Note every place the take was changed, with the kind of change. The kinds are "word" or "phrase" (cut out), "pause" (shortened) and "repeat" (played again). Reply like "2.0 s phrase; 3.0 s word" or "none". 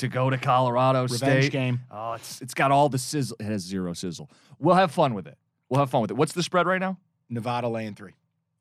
none